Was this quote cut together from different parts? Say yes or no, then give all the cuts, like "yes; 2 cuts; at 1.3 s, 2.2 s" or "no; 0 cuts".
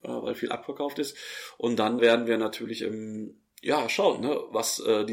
yes; 1 cut; at 2.0 s